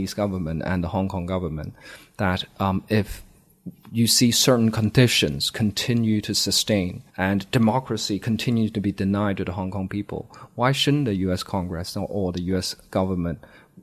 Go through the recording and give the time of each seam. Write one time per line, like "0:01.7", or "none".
0:07.1